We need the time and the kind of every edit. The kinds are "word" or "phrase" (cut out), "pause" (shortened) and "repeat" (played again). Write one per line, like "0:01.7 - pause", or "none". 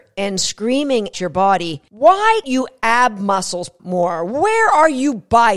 0:01.1 - word
0:02.4 - word
0:03.8 - word